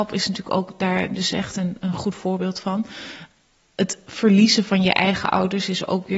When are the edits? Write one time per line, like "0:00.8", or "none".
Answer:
none